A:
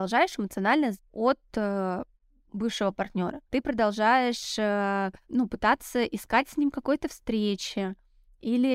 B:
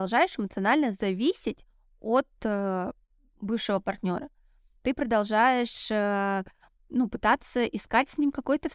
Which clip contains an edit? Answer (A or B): A